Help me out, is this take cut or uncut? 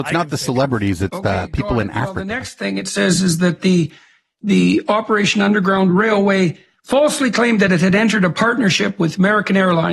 uncut